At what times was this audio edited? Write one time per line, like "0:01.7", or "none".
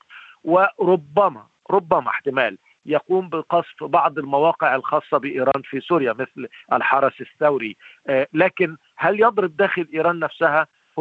none